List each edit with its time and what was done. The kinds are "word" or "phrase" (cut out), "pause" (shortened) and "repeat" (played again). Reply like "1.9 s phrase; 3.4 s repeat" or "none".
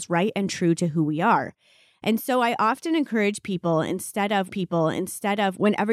4.5 s repeat